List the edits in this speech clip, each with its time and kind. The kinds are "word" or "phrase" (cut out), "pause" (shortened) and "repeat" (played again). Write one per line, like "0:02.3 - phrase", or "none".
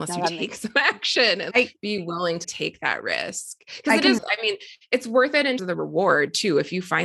0:01.5 - word
0:02.4 - word
0:04.2 - word
0:05.6 - word